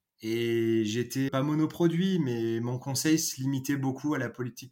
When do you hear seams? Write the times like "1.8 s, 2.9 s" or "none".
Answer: 1.3 s